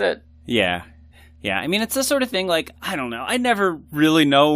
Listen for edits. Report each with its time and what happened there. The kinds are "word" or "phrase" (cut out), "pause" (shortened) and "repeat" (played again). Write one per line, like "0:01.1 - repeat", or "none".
0:01.1 - pause
0:02.8 - pause